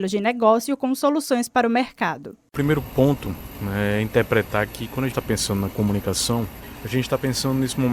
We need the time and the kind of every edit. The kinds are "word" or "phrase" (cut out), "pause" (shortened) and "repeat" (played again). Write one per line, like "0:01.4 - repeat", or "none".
0:05.1 - word